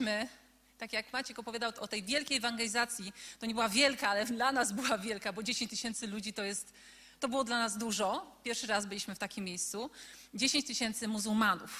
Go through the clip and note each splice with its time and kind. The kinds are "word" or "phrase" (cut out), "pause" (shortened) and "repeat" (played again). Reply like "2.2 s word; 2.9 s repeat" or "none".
none